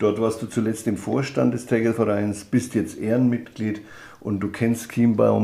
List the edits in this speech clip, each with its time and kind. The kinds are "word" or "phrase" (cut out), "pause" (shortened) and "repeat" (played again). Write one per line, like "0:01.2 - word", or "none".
none